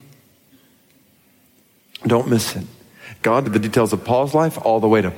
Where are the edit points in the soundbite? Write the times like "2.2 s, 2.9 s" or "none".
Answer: 3.5 s